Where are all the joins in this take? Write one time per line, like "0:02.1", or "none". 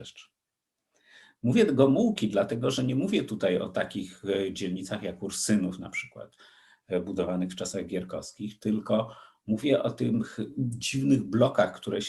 none